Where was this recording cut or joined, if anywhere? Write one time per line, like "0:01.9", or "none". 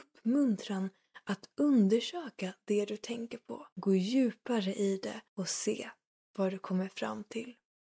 0:03.7
0:05.3